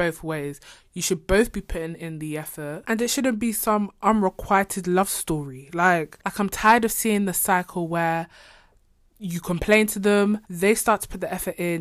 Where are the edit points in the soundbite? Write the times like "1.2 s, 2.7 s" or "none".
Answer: 10.4 s